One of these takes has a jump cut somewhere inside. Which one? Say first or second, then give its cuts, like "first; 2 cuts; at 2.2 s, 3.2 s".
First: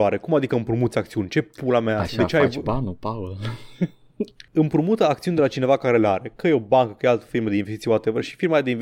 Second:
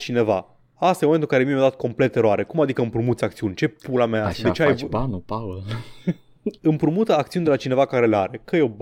second; 1 cut; at 6.6 s